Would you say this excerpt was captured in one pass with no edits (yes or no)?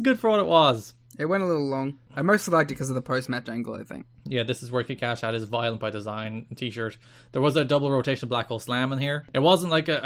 yes